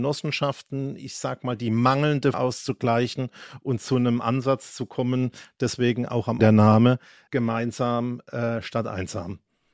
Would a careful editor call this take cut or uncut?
cut